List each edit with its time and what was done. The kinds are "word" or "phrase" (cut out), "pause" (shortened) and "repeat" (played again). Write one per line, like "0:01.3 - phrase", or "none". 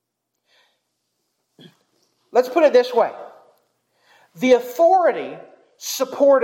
none